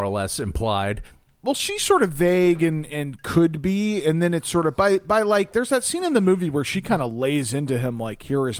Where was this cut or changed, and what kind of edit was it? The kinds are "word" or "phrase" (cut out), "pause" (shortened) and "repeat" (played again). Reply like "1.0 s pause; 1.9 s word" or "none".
none